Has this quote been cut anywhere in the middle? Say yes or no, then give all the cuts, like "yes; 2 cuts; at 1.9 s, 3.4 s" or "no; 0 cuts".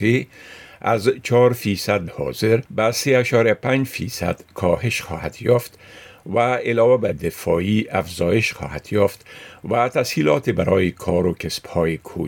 yes; 3 cuts; at 2.1 s, 2.7 s, 7.1 s